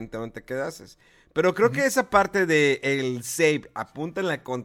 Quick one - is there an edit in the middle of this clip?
no; 0 cuts

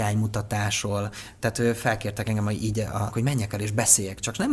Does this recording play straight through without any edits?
no; 1 cut; at 3.1 s

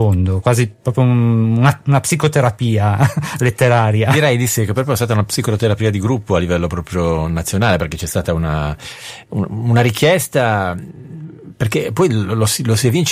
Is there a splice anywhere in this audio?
no; 0 cuts

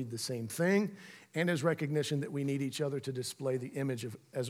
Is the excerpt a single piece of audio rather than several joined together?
yes; 0 cuts

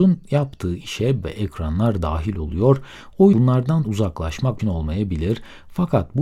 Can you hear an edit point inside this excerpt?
yes; 4 cuts; at 1.2 s, 3.3 s, 3.8 s, 4.6 s

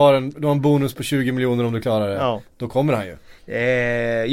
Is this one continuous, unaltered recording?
no; 1 cut; at 3.4 s

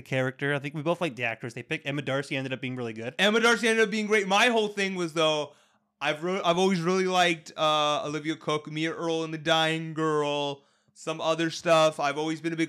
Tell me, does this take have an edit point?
no; 0 cuts

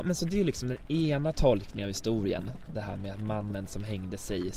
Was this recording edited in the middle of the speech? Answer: no; 0 cuts

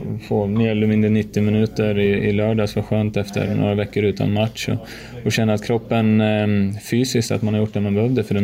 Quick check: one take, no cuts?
yes; 0 cuts

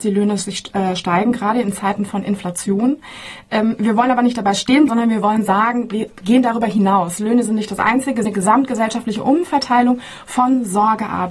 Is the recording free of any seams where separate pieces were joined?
no; 2 cuts; at 4.9 s, 8.2 s

